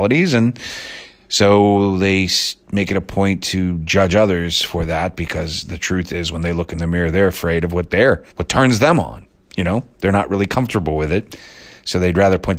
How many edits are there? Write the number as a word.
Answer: two